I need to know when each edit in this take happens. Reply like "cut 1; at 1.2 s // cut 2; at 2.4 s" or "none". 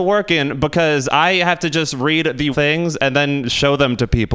cut 1; at 2.5 s